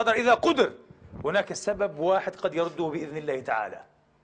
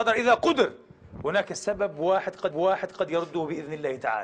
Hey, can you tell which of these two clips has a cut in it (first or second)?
second